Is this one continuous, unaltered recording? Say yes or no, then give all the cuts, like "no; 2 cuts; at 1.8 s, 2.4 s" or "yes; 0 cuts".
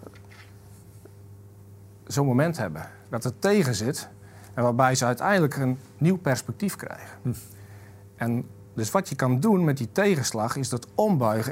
yes; 0 cuts